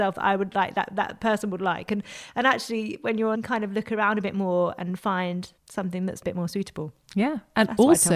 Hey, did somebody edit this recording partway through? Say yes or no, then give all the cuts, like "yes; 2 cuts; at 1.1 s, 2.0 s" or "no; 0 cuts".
yes; 3 cuts; at 3.3 s, 5.6 s, 6.2 s